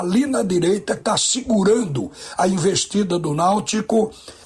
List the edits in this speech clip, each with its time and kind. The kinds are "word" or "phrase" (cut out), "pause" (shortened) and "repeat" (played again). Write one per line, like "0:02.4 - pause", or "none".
0:01.0 - word